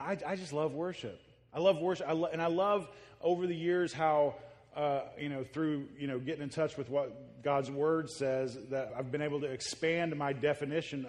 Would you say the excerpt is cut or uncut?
cut